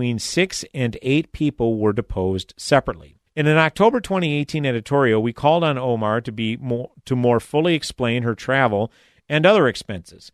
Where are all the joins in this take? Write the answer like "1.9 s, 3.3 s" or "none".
3.3 s